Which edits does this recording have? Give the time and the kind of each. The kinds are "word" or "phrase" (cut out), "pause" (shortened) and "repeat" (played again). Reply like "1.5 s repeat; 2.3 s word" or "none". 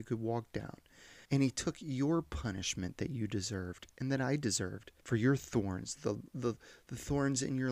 1.2 s pause; 5.0 s pause

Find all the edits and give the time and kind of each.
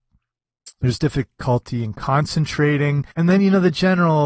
3.1 s pause

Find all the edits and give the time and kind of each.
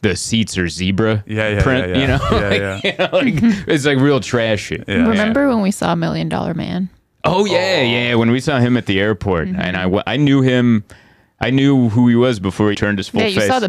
12.7 s word

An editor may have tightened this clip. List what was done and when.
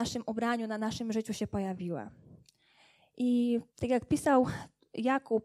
3.7 s pause

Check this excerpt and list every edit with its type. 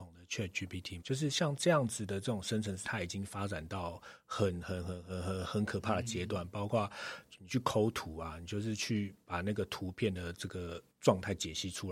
1.0 s word; 2.8 s word; 10.9 s pause

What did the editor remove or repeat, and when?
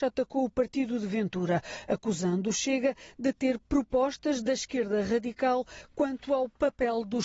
none

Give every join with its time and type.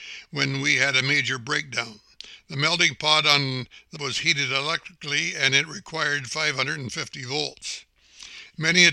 4.0 s word

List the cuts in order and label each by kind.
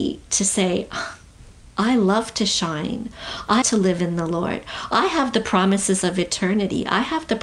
3.6 s word

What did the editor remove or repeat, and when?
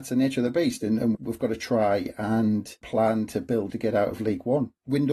1.1 s word; 3.7 s phrase

